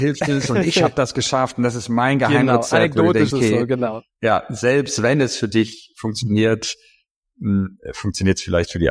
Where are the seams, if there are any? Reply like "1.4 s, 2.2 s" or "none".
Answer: 3.3 s